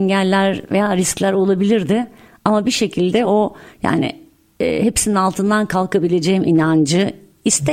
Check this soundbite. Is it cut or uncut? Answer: uncut